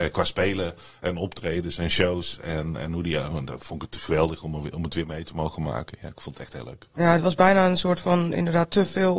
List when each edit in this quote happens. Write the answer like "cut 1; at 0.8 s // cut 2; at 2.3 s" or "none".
none

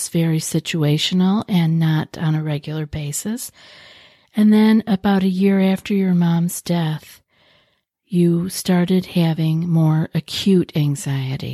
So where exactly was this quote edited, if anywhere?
none

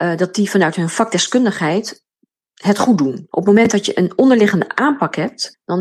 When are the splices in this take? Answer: none

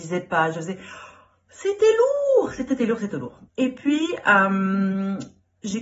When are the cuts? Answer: cut 1; at 2.7 s // cut 2; at 3.5 s

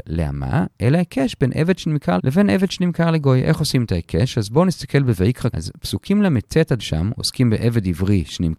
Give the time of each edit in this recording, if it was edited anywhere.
cut 1; at 2.2 s // cut 2; at 5.5 s // cut 3; at 6.8 s

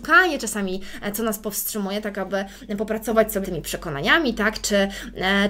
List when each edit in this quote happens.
cut 1; at 1.1 s // cut 2; at 3.4 s

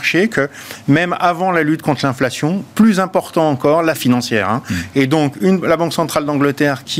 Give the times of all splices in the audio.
cut 1; at 4.0 s

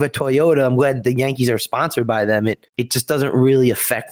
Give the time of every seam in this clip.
cut 1; at 2.7 s

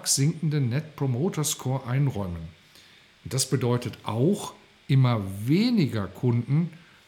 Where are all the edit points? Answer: none

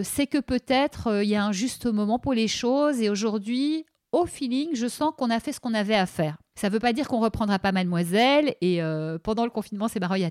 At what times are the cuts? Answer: none

